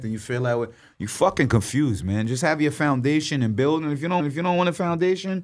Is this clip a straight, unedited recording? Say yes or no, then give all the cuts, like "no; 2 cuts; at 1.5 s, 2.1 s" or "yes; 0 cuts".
no; 1 cut; at 4.2 s